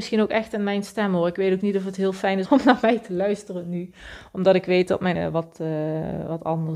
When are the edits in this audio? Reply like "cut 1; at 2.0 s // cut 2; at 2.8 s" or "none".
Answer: cut 1; at 2.4 s // cut 2; at 5.1 s